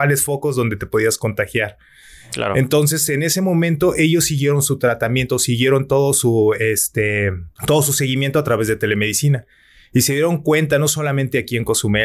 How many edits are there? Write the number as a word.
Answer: one